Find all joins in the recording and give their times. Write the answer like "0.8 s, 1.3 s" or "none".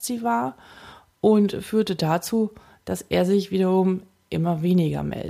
none